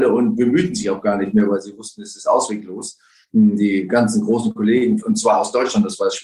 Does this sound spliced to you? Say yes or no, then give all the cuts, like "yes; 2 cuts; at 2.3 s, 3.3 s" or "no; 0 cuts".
no; 0 cuts